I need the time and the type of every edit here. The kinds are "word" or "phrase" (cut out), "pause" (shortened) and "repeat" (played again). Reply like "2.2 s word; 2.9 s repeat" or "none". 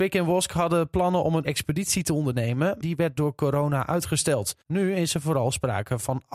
1.4 s word; 2.8 s word; 4.6 s pause